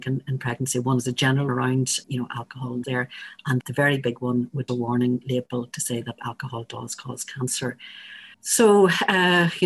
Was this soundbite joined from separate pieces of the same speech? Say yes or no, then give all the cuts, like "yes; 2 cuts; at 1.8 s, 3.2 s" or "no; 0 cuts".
yes; 7 cuts; at 1.5 s, 2.0 s, 2.8 s, 3.6 s, 4.7 s, 6.2 s, 8.3 s